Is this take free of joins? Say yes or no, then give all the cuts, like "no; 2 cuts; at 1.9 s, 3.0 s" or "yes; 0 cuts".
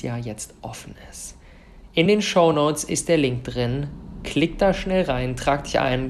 yes; 0 cuts